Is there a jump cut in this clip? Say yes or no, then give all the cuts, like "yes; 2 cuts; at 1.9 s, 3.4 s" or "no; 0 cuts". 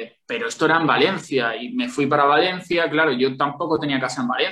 no; 0 cuts